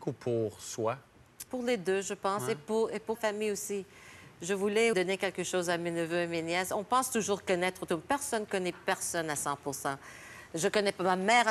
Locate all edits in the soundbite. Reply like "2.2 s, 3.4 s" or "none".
1.5 s, 3.1 s, 4.9 s